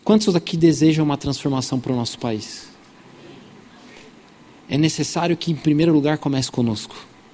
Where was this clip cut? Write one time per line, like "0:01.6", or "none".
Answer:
none